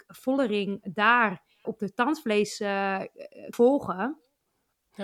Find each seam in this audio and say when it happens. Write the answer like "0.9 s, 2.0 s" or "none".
1.6 s, 3.5 s